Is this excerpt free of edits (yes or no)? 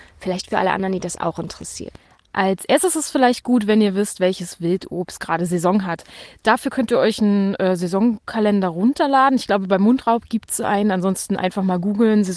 yes